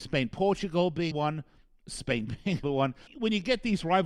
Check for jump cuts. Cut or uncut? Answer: cut